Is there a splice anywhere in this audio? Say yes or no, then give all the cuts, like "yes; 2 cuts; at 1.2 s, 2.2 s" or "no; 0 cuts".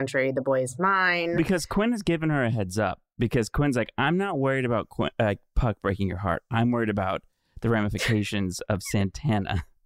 no; 0 cuts